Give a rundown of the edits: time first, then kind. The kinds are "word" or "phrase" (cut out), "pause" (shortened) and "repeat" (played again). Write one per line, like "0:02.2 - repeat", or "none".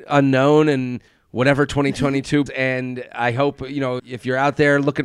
0:01.1 - pause
0:02.5 - word
0:04.0 - word